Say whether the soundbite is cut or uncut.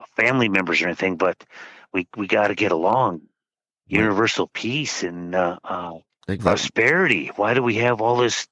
cut